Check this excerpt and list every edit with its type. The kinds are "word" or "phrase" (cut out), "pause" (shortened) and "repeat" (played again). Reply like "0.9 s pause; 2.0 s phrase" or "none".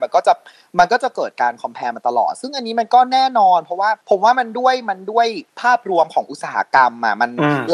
4.0 s pause; 5.5 s pause